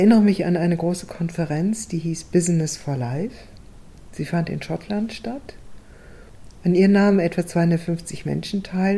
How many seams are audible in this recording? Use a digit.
0